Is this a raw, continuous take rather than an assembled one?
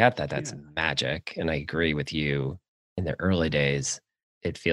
yes; 0 cuts

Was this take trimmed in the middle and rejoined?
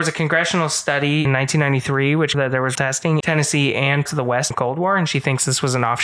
yes; 6 cuts; at 1.2 s, 2.3 s, 2.7 s, 3.2 s, 4.1 s, 4.5 s

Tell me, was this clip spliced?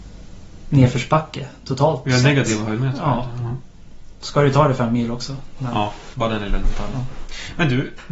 yes; 1 cut; at 6.1 s

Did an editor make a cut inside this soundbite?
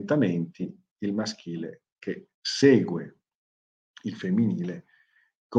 yes; 1 cut; at 2.3 s

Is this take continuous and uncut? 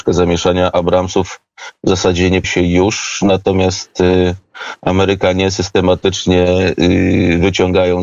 no; 1 cut; at 2.4 s

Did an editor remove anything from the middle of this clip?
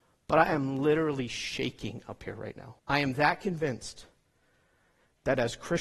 yes; 1 cut; at 2.8 s

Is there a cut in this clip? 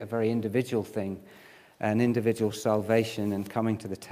no; 0 cuts

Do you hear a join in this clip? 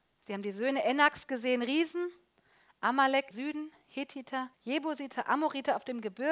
yes; 2 cuts; at 3.3 s, 4.5 s

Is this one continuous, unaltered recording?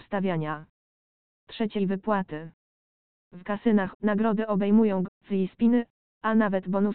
no; 3 cuts; at 1.8 s, 3.9 s, 5.0 s

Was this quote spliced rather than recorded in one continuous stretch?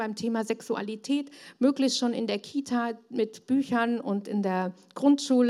no; 0 cuts

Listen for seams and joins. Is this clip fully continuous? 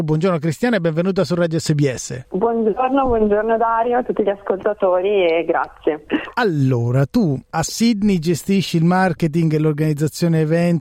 yes; 0 cuts

